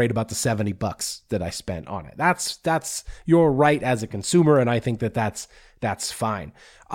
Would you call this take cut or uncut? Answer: uncut